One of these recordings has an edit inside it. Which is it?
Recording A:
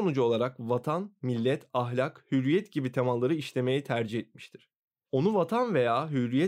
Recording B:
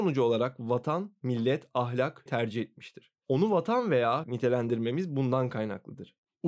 B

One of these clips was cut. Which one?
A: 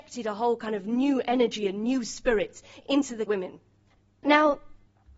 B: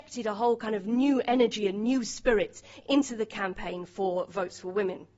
A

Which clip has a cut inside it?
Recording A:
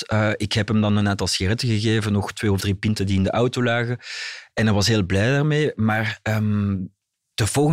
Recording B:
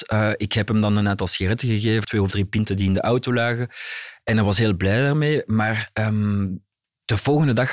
B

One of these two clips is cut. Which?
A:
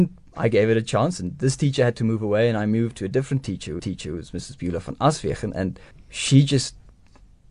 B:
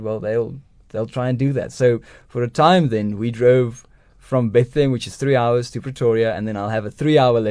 A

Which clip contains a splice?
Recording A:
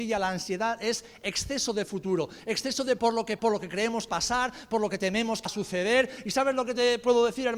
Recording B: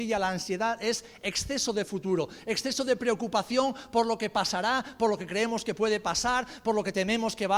A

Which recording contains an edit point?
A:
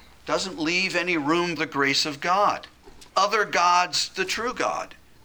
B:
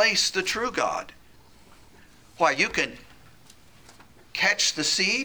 A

